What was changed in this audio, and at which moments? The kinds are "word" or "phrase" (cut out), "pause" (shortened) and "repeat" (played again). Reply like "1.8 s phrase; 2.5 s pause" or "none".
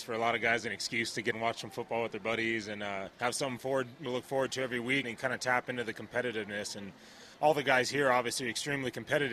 1.3 s word; 3.1 s pause; 4.1 s word; 5.0 s word; 7.3 s pause